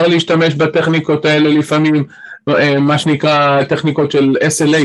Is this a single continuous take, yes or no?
yes